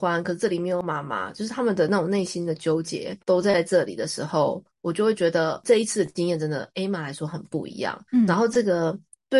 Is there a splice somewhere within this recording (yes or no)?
yes